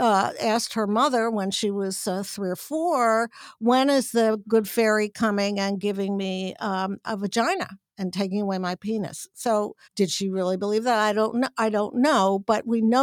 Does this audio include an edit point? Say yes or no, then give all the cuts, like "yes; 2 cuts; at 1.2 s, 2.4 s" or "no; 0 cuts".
yes; 1 cut; at 9.8 s